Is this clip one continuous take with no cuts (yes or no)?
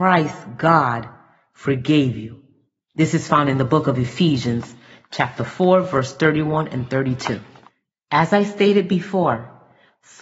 yes